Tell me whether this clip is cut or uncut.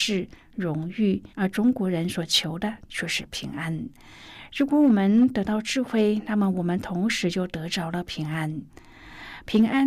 cut